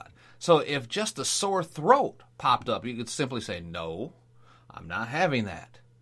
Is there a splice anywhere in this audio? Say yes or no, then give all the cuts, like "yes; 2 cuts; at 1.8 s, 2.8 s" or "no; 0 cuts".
no; 0 cuts